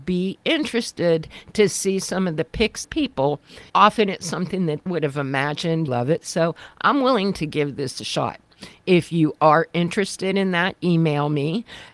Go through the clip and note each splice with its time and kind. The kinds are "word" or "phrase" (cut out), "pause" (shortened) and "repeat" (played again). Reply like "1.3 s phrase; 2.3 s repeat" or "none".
2.8 s phrase; 3.7 s pause; 4.9 s phrase; 5.9 s phrase; 10.8 s word